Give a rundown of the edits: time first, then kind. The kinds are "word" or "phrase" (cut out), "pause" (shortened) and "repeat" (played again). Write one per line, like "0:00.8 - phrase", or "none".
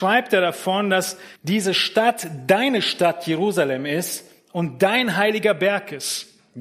0:01.4 - pause

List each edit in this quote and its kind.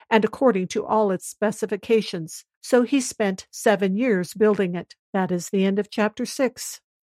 0:02.5 - pause
0:05.0 - pause

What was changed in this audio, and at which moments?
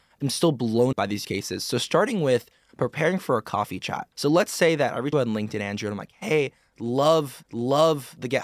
0:00.9 - word
0:01.2 - word
0:04.1 - pause
0:05.1 - phrase
0:07.4 - repeat

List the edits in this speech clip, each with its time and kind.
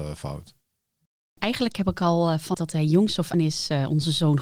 0:02.5 - word
0:03.3 - word

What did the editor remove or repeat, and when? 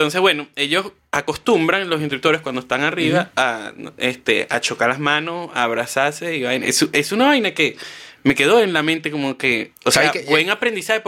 0:01.0 - pause
0:09.8 - pause

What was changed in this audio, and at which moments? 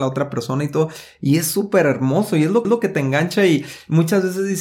0:02.6 - repeat

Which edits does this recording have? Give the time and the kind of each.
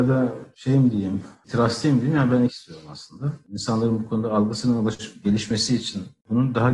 0:02.5 - phrase

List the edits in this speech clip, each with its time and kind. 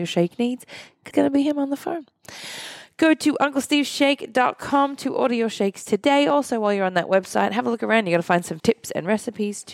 0:01.1 - word
0:08.6 - word

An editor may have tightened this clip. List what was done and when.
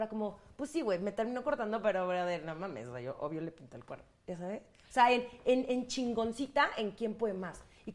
none

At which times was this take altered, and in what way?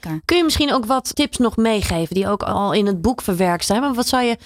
0:01.1 - word

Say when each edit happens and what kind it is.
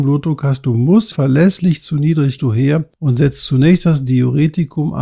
0:01.1 - word
0:02.4 - phrase
0:02.9 - pause

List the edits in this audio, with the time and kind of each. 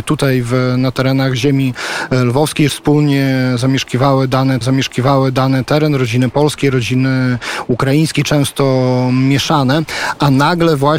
0:02.7 - phrase
0:04.6 - repeat

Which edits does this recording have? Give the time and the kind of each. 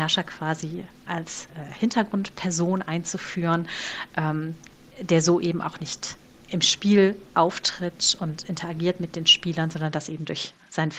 none

